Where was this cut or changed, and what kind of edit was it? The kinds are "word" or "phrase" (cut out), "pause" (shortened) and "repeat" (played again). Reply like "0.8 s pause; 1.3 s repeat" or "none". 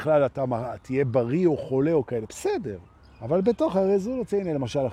3.0 s pause